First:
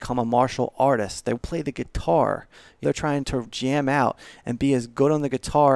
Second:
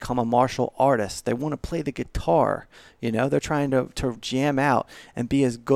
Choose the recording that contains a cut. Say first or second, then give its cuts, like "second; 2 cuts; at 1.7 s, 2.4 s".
first; 3 cuts; at 1.4 s, 2.8 s, 3.2 s